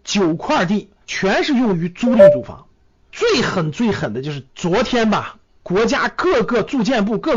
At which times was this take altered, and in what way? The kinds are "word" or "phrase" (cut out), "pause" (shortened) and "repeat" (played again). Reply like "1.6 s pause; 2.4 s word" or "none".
1.0 s pause

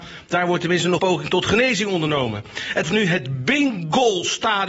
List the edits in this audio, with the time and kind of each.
1.0 s word; 2.8 s phrase

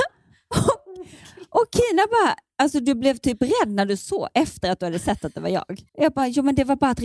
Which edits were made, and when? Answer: 5.9 s pause

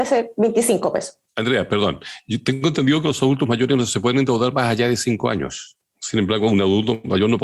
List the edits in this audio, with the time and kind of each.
1.3 s pause

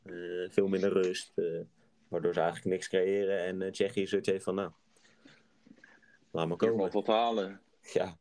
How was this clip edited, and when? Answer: none

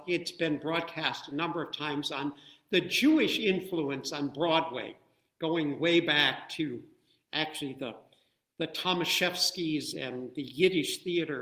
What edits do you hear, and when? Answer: none

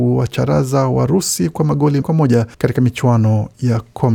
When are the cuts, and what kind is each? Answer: 2.0 s word; 2.5 s pause

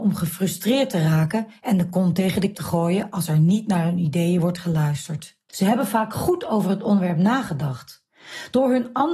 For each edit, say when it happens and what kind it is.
2.5 s word; 5.5 s pause

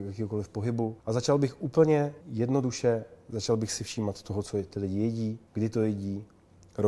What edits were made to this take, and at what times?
1.0 s pause; 2.2 s pause; 5.5 s pause

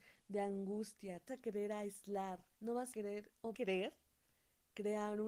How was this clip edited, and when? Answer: 1.3 s word; 2.5 s pause; 2.9 s word; 3.5 s phrase

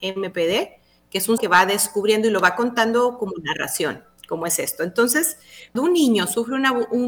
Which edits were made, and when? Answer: 1.4 s word; 5.8 s word

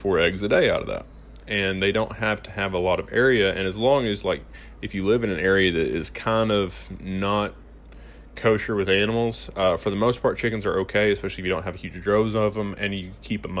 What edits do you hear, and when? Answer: none

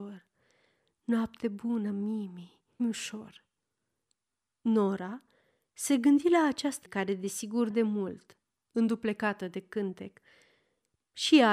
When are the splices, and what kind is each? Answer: 2.8 s word; 6.9 s word; 7.7 s word

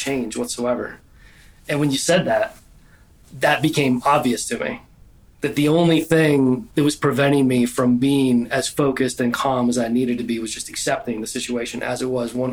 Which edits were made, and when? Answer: none

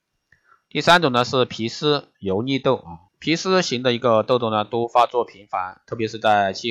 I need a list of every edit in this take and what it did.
3.1 s pause

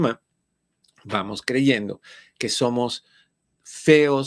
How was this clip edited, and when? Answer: none

